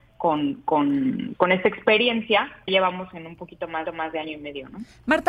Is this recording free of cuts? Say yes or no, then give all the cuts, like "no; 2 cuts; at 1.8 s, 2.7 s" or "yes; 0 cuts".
no; 3 cuts; at 1.4 s, 2.7 s, 3.9 s